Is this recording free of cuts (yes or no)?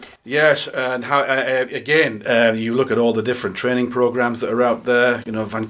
yes